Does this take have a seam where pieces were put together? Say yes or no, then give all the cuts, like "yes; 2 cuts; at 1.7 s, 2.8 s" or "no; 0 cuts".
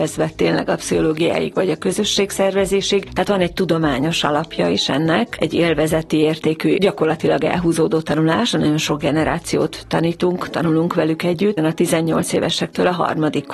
yes; 1 cut; at 11.6 s